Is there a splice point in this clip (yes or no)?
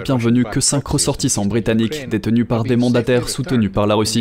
no